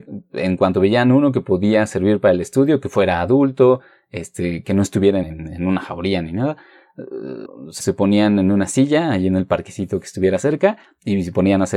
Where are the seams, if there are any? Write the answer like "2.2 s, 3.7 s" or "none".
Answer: 4.6 s, 5.2 s, 7.8 s